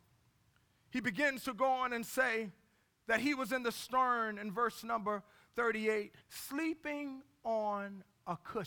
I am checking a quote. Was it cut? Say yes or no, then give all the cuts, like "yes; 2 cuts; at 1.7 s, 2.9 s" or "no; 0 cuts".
yes; 1 cut; at 6.2 s